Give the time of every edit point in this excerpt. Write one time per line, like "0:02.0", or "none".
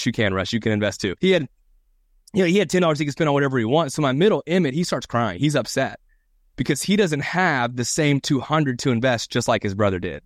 0:01.2